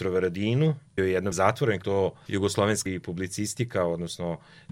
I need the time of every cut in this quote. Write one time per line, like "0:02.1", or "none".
0:01.0
0:01.3
0:01.8
0:02.9